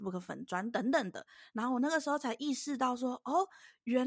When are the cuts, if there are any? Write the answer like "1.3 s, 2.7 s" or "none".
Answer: none